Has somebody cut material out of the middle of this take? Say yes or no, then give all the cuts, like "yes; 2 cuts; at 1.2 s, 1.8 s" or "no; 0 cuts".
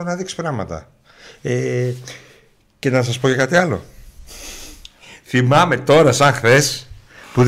no; 0 cuts